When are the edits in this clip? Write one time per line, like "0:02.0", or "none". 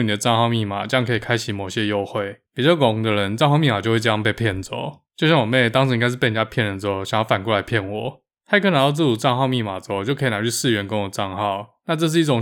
0:02.5
0:05.1